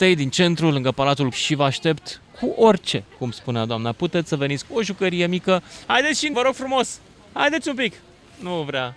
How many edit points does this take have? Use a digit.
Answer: 5